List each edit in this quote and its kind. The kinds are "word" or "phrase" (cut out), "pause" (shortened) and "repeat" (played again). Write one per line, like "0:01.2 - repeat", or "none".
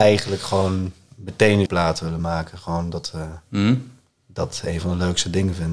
0:01.7 - phrase